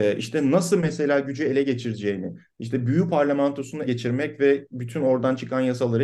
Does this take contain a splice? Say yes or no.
yes